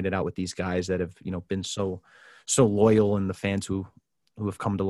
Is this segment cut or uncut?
uncut